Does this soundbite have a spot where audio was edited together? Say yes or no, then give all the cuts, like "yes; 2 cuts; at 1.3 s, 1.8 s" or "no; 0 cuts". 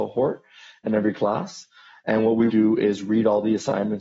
yes; 1 cut; at 2.5 s